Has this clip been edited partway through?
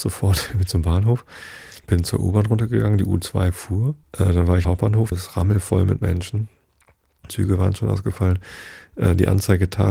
yes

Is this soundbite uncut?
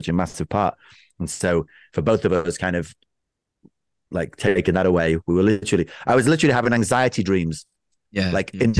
yes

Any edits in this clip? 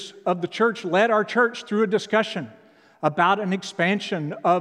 no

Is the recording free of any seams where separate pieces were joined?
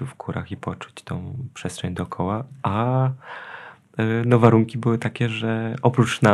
yes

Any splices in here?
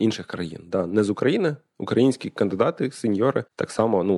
no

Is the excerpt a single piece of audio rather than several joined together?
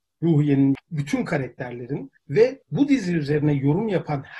no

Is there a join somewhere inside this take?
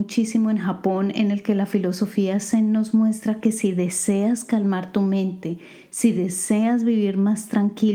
no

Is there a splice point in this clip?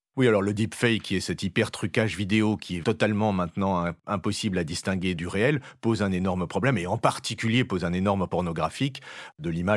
yes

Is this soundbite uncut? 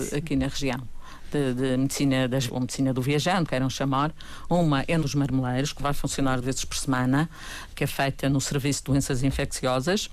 no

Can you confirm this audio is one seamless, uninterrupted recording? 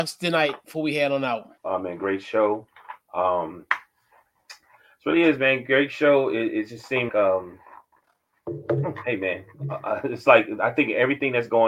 no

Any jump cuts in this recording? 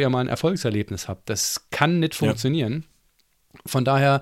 no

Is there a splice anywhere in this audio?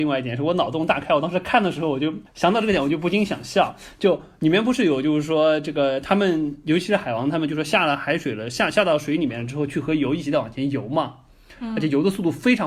no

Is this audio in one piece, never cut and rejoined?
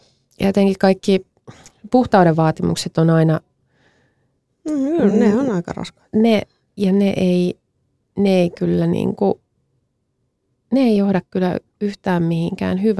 yes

